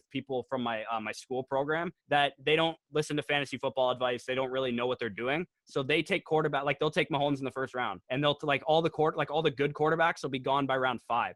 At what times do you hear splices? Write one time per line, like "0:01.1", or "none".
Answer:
0:02.0
0:08.0